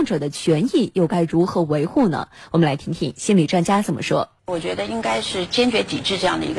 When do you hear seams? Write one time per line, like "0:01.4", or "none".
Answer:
0:04.4